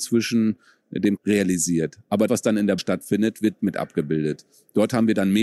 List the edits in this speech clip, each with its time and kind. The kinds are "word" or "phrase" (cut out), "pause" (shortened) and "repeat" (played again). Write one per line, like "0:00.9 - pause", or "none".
0:01.2 - phrase
0:02.3 - word
0:02.8 - word
0:03.6 - word

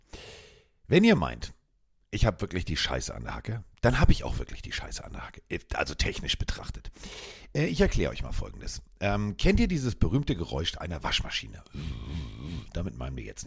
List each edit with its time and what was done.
none

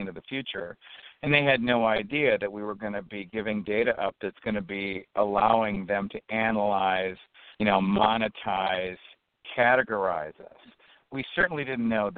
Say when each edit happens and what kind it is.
0:07.5 - pause

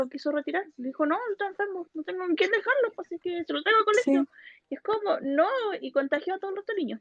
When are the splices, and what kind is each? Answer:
0:01.9 - word

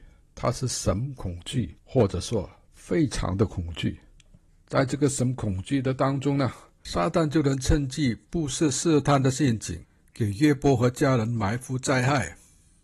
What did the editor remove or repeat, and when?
0:01.8 - pause

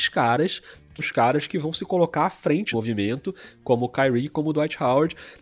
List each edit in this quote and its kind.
0:01.0 - word
0:02.7 - word

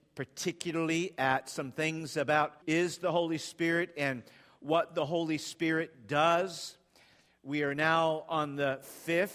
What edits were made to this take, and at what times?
0:02.6 - word

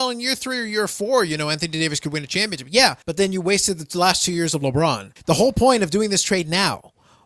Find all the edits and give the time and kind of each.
0:03.0 - pause
0:05.2 - pause

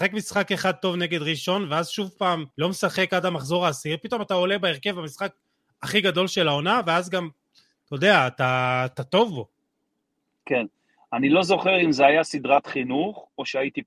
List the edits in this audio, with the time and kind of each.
0:02.5 - pause

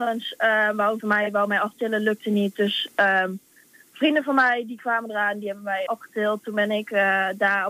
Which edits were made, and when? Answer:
0:01.0 - word
0:05.9 - word

